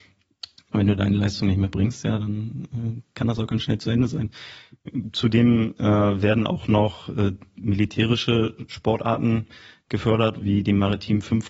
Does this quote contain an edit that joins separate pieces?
no; 0 cuts

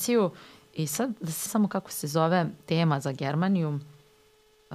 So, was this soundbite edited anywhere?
yes; 1 cut; at 1.5 s

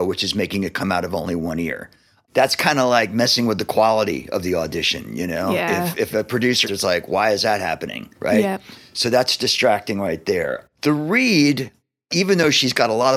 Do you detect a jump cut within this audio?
yes; 2 cuts; at 6.6 s, 8.2 s

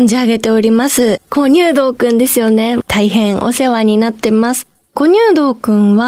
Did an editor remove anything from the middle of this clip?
no; 0 cuts

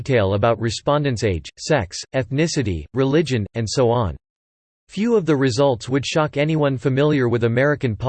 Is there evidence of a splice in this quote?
no; 0 cuts

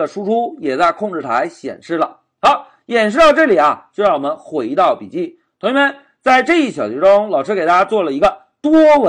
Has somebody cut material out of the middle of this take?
no; 0 cuts

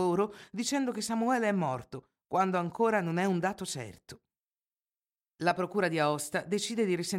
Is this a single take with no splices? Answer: yes; 0 cuts

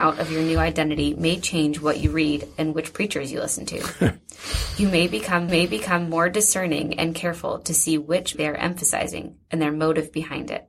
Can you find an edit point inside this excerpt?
yes; 2 cuts; at 5.5 s, 8.3 s

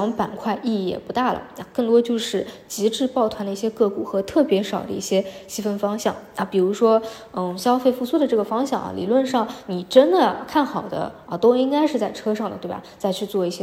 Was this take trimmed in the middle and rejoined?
no; 0 cuts

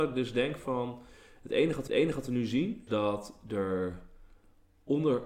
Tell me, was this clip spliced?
yes; 2 cuts; at 1.9 s, 2.9 s

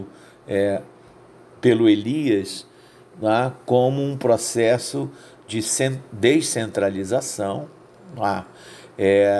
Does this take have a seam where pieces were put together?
no; 0 cuts

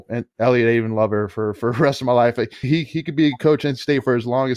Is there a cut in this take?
yes; 1 cut; at 2.6 s

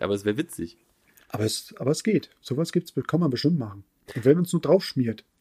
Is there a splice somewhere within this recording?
no; 0 cuts

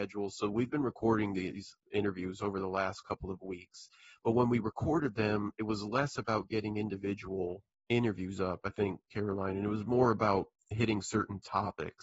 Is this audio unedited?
yes; 0 cuts

